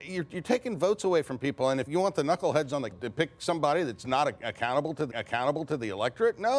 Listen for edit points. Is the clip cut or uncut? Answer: cut